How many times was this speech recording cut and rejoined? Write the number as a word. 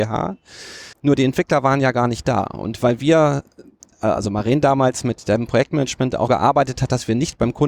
two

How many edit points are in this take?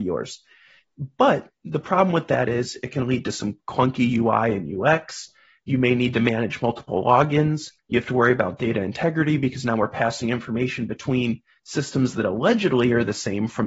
one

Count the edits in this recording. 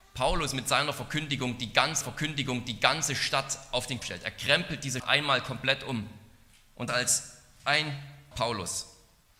five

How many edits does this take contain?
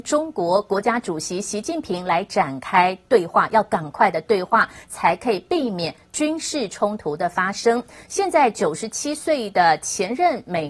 zero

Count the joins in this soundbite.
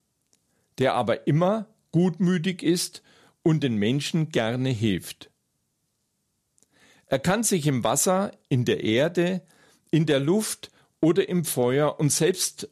zero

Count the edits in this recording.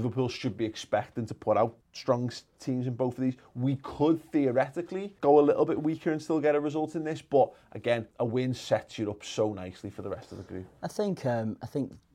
three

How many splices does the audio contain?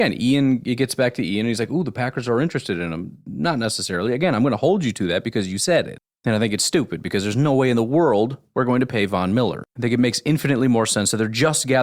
one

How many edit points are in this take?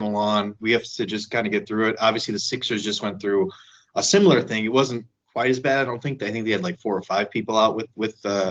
zero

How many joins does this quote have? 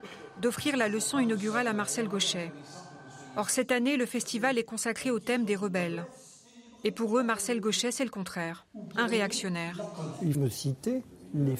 one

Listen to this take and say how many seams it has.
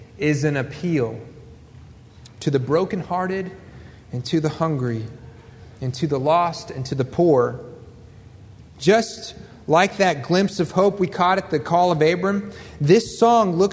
one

